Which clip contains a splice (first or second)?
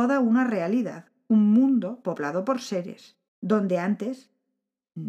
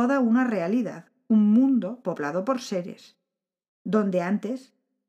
first